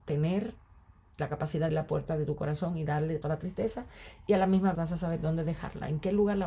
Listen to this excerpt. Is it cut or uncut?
cut